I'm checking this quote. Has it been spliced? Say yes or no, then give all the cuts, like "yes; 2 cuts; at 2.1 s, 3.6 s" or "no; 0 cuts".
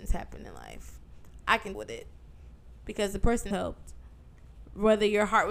yes; 2 cuts; at 1.7 s, 3.5 s